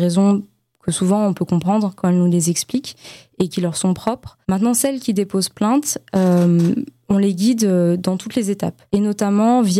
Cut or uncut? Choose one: cut